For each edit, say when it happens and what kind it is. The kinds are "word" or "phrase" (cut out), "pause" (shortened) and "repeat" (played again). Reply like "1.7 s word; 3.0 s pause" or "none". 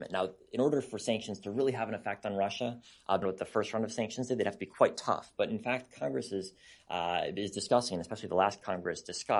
3.2 s word